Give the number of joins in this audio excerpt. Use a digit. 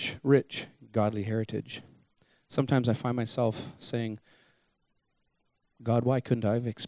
0